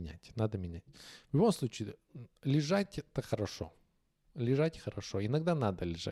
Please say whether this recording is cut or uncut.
uncut